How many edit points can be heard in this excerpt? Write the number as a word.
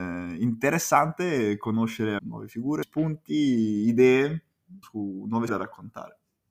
four